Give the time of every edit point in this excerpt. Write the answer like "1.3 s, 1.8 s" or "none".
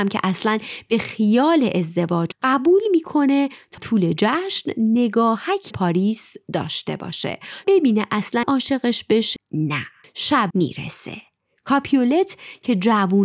2.3 s, 3.8 s, 5.7 s, 7.6 s, 8.4 s, 9.4 s, 10.5 s